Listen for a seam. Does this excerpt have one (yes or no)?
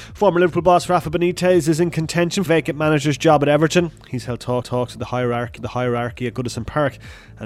yes